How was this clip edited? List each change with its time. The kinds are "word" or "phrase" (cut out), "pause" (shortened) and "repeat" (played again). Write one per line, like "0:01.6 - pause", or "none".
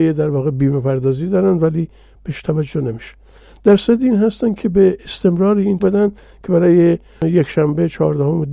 0:05.8 - phrase